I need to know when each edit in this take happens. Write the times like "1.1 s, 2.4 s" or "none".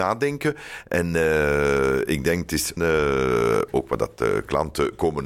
2.8 s